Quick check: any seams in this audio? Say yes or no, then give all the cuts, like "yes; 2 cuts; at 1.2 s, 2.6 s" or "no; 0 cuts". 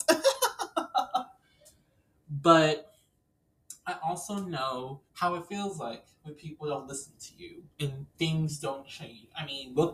yes; 2 cuts; at 5.1 s, 8.1 s